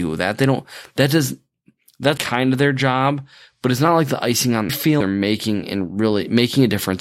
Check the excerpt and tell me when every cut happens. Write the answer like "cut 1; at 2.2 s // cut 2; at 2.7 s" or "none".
cut 1; at 2.2 s // cut 2; at 4.7 s // cut 3; at 5.0 s